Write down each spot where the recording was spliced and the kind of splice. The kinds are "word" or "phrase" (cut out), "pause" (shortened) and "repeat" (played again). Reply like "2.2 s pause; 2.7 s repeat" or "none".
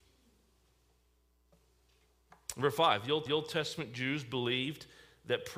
3.3 s repeat